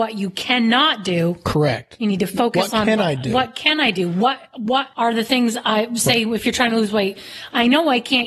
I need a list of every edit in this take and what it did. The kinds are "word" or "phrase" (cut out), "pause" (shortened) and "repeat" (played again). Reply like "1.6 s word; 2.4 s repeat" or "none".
none